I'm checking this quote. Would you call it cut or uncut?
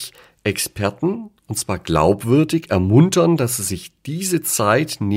uncut